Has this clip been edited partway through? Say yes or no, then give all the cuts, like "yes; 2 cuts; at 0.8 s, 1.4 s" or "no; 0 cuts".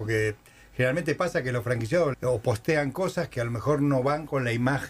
yes; 1 cut; at 2.1 s